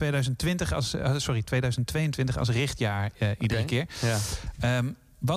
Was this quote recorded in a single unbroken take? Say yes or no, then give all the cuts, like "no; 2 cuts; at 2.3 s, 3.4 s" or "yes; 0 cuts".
yes; 0 cuts